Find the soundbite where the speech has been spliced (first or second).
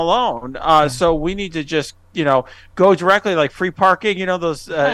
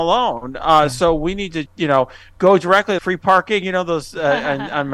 second